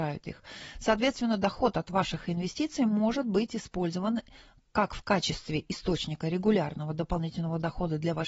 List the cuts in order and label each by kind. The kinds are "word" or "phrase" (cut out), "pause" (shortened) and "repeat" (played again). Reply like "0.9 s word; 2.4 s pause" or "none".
none